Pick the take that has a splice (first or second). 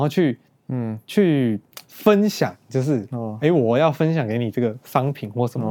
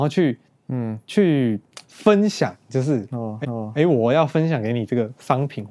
second